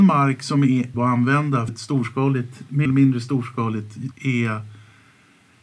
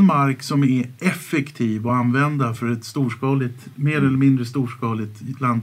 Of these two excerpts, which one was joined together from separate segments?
first; 4 cuts; at 0.9 s, 1.7 s, 2.8 s, 4.1 s

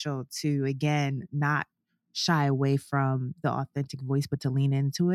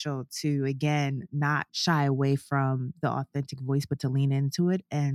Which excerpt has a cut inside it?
second; 1 cut; at 1.7 s

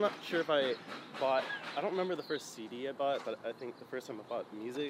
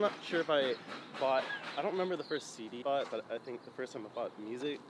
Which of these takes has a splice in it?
second; 1 cut; at 2.8 s

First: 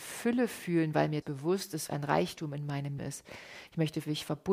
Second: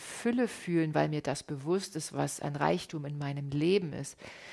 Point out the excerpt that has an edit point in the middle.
first; 3 cuts; at 1.2 s, 1.9 s, 3.0 s

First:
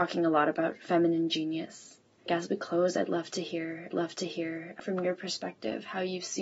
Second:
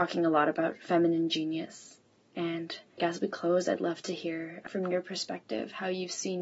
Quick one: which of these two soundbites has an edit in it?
first; 2 cuts; at 2.2 s, 3.9 s

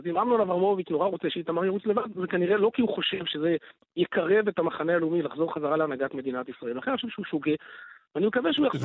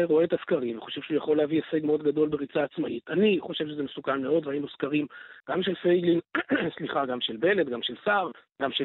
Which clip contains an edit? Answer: second; 1 cut; at 5.4 s

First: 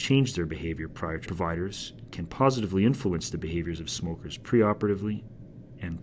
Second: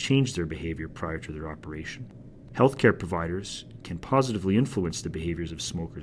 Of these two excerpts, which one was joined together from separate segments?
first; 1 cut; at 1.3 s

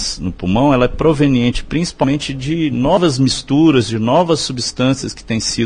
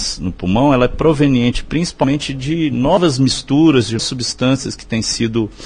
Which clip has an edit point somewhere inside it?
second; 1 cut; at 4.0 s

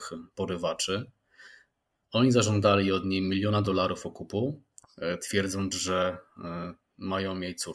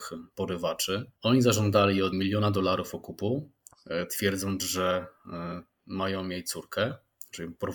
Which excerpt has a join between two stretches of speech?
second; 2 cuts; at 1.2 s, 2.1 s

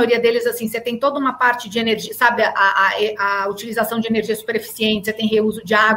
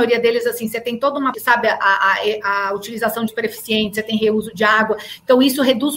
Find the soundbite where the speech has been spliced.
second; 2 cuts; at 1.3 s, 3.3 s

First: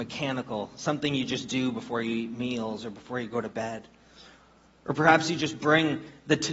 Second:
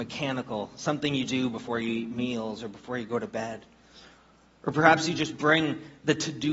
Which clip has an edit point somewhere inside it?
second; 1 cut; at 1.3 s

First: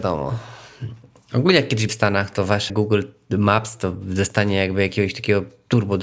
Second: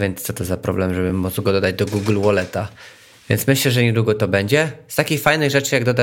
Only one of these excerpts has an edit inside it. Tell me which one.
first; 2 cuts; at 1.9 s, 2.7 s

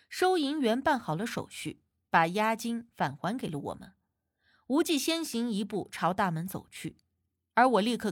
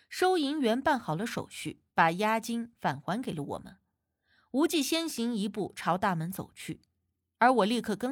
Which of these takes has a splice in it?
second; 1 cut; at 1.9 s

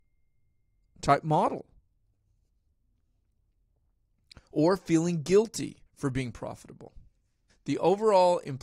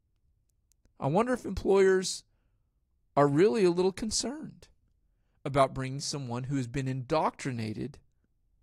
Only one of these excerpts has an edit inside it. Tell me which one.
first; 2 cuts; at 5.9 s, 7.5 s

